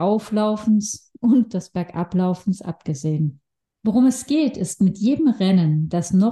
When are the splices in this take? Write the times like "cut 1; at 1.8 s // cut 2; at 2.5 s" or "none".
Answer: none